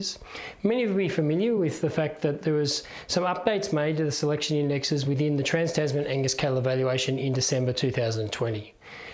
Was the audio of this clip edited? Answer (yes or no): no